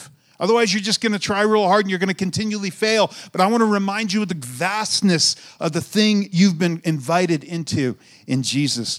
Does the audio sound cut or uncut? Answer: uncut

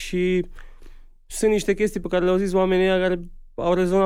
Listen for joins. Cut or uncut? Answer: uncut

